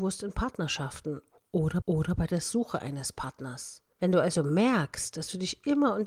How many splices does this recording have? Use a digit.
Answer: 2